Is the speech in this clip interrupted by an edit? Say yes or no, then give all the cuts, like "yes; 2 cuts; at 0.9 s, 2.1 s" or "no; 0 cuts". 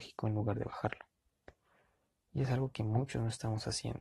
no; 0 cuts